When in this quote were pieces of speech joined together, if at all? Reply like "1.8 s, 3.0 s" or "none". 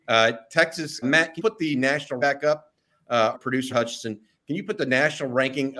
1.0 s, 1.4 s, 2.2 s, 3.3 s, 3.7 s

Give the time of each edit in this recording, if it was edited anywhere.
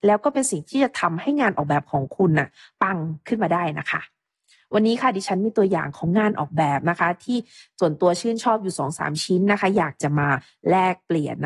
none

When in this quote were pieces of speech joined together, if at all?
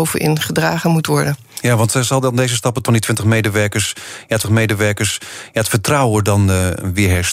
2.9 s, 4.4 s

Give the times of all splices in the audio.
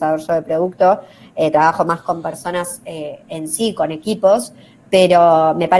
none

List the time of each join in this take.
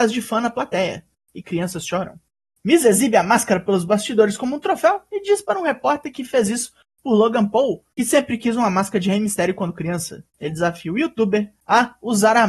7.9 s, 10.3 s

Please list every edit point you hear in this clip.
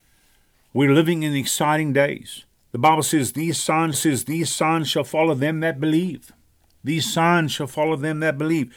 2.5 s, 3.9 s

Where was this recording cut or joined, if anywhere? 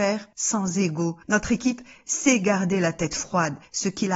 none

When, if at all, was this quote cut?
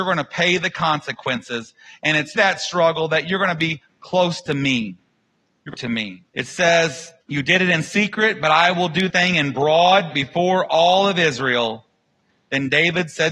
2.4 s, 5.7 s, 6.3 s, 7.2 s, 9.1 s, 10.1 s

